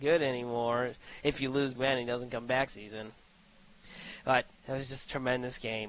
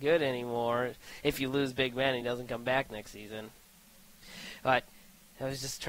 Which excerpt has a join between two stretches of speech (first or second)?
first